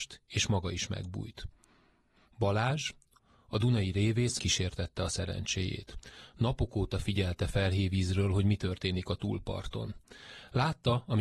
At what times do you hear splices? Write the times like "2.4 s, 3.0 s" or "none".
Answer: 4.4 s